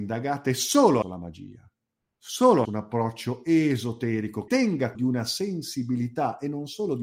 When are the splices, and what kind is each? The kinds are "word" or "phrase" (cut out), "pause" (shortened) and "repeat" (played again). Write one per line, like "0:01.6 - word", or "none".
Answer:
0:01.0 - word
0:02.6 - word
0:04.5 - word
0:04.9 - word